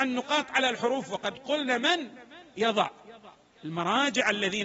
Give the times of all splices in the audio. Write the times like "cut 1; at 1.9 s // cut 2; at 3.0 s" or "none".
none

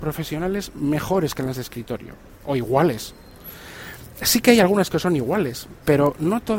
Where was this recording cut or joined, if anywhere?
none

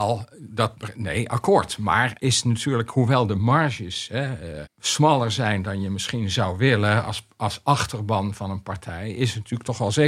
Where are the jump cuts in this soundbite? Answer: cut 1; at 2.2 s // cut 2; at 4.6 s

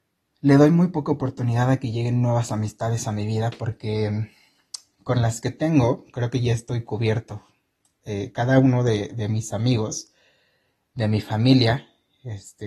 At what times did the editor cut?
none

